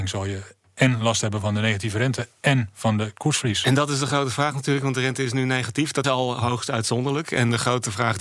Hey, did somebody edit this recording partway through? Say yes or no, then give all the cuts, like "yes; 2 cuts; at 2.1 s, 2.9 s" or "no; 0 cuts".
yes; 1 cut; at 6.0 s